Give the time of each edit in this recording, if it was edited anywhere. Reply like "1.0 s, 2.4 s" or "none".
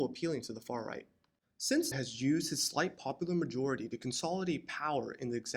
1.9 s

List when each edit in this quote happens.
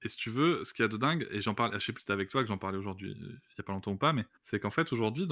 2.0 s, 4.4 s

